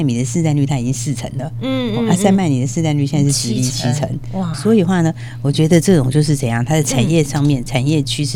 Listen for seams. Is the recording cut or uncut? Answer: cut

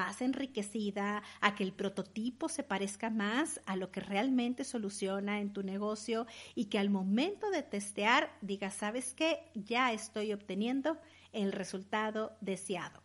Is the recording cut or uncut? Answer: uncut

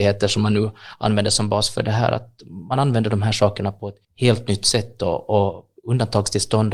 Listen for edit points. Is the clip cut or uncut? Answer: cut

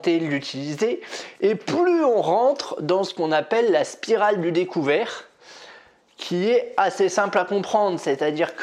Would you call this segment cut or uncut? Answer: uncut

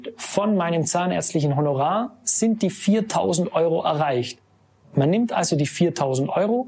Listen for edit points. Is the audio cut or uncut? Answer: uncut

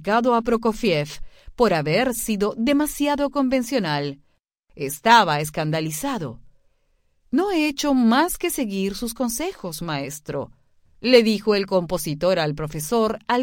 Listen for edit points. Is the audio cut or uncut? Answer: uncut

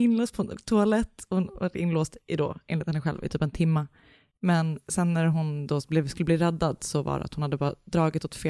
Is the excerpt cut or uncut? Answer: cut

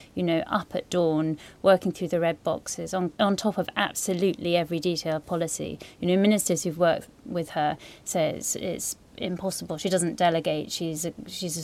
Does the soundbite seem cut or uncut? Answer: uncut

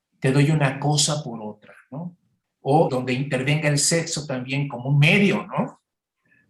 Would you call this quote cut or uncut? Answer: cut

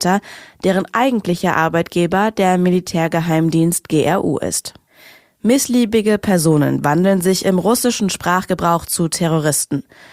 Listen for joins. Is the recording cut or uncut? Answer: uncut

